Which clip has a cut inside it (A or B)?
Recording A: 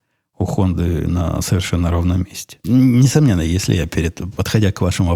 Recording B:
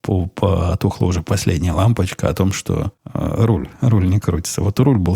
B